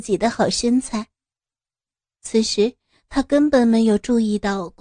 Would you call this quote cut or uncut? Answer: uncut